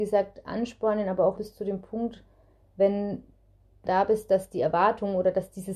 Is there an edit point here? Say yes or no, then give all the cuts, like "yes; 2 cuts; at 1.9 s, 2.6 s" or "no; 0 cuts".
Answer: yes; 2 cuts; at 1.4 s, 3.9 s